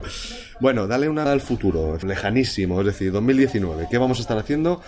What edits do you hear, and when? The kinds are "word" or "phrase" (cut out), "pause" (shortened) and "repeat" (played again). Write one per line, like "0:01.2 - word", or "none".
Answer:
0:01.3 - word
0:02.0 - word

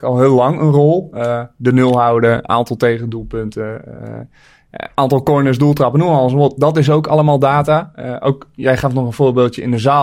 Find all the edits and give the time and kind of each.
none

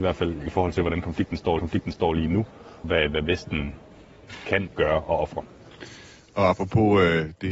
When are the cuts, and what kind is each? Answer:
0:01.6 - repeat
0:02.8 - word
0:04.7 - phrase

